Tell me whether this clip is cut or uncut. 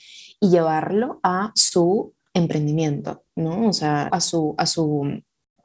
cut